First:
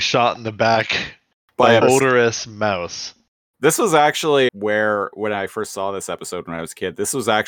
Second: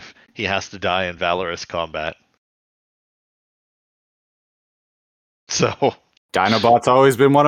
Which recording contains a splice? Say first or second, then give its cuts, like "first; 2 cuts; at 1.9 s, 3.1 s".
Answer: first; 2 cuts; at 1.8 s, 4.5 s